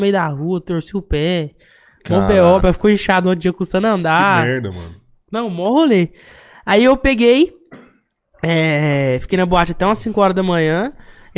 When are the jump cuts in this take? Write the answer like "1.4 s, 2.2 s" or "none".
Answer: 2.6 s